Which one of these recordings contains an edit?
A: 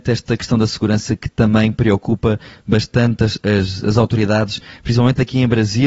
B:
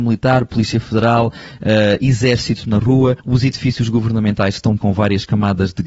B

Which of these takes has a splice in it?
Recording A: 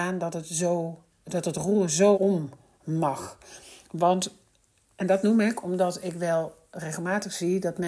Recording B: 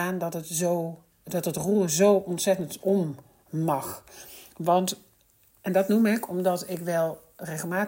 A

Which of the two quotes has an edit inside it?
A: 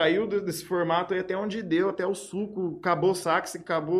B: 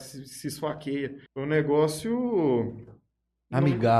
B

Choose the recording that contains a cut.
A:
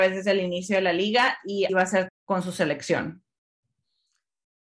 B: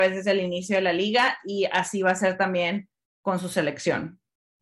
A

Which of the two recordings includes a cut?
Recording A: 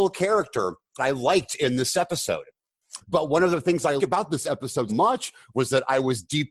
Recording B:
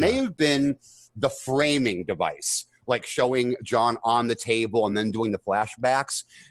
A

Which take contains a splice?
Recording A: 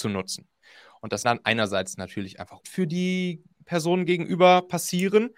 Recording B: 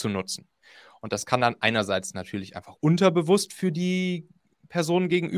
A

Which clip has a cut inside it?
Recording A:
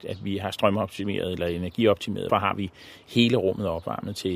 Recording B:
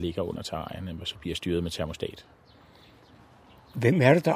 A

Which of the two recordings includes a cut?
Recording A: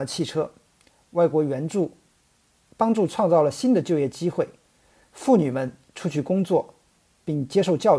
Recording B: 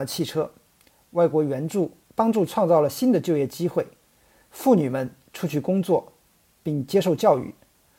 B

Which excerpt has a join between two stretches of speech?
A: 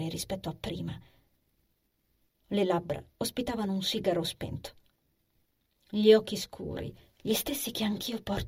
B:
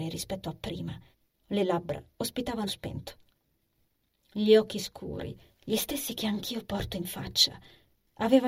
B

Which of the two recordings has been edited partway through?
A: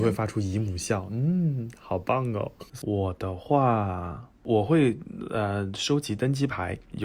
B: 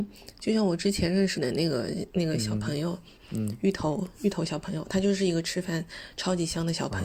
A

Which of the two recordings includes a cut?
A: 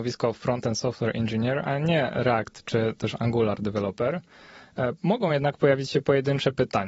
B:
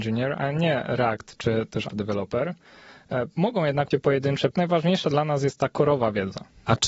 B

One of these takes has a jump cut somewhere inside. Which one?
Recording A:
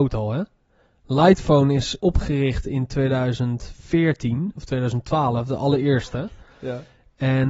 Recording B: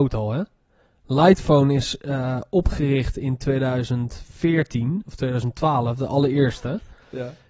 A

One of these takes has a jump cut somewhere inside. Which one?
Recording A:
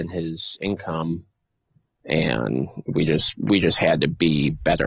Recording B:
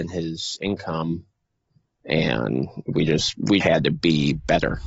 B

